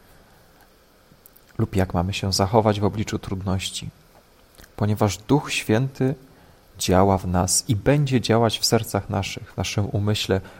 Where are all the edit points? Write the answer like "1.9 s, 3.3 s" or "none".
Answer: none